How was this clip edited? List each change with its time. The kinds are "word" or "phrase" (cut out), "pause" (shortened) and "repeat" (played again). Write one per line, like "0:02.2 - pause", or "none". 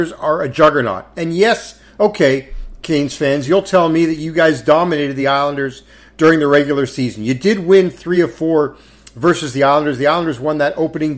none